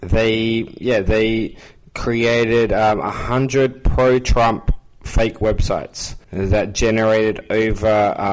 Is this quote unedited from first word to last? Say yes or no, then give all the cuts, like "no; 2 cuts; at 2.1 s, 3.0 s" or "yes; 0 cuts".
no; 1 cut; at 6.2 s